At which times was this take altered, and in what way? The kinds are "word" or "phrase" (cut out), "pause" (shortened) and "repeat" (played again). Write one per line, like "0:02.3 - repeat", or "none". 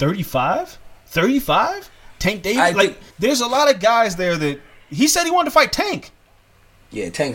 0:03.1 - pause